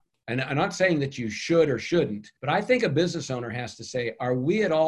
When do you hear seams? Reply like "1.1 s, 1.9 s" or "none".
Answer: 2.4 s